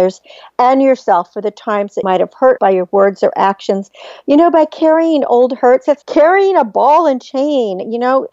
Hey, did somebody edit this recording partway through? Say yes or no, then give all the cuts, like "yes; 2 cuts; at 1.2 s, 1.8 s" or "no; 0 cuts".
yes; 3 cuts; at 2.0 s, 2.6 s, 6.0 s